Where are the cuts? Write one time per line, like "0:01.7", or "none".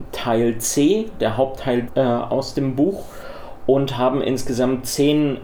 0:01.9